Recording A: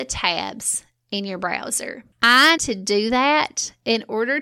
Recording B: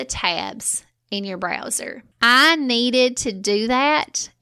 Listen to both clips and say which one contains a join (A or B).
A